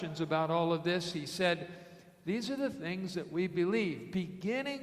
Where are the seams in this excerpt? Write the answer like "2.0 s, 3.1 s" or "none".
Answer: none